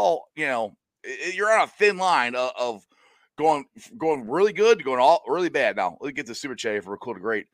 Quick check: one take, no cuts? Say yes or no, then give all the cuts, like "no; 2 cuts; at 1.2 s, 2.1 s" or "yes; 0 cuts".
yes; 0 cuts